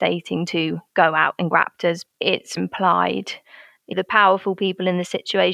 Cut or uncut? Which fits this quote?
cut